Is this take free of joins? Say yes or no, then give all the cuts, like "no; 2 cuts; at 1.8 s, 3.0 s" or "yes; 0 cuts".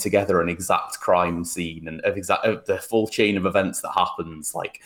yes; 0 cuts